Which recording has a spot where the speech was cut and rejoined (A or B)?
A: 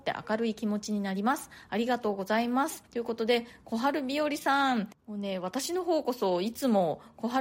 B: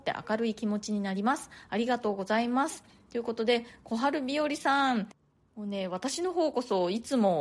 A